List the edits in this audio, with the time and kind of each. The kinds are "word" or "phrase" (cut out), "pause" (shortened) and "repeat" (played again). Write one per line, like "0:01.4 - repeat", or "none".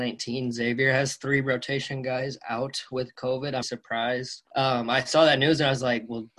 0:03.6 - word
0:04.5 - pause